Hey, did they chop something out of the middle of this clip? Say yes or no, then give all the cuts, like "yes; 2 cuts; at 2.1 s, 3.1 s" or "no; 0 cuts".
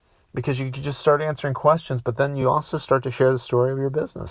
no; 0 cuts